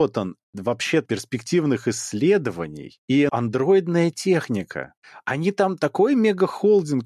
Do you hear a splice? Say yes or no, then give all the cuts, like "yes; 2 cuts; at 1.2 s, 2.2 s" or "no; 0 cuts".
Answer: yes; 2 cuts; at 1.0 s, 3.3 s